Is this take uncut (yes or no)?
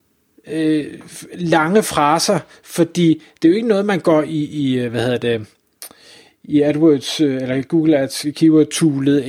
yes